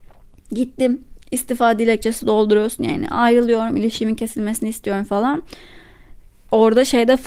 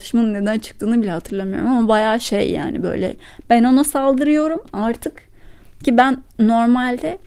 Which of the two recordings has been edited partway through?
second; 1 cut; at 6.3 s

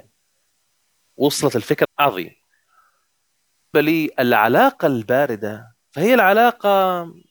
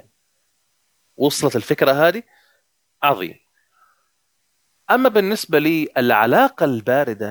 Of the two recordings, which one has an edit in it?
first; 2 cuts; at 1.8 s, 3.7 s

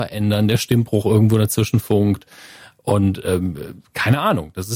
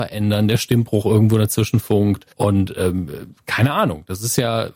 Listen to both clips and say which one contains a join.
second; 1 cut; at 2.3 s

